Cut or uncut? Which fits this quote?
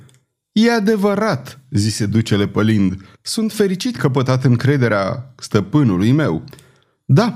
cut